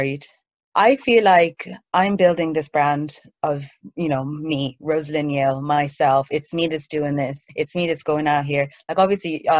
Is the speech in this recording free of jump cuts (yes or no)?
no